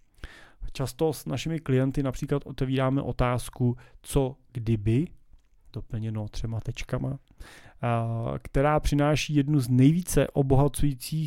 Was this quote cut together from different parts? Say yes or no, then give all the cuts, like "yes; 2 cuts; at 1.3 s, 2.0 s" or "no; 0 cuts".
no; 0 cuts